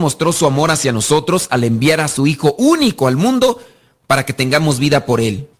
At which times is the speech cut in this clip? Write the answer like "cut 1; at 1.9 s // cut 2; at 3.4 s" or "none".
none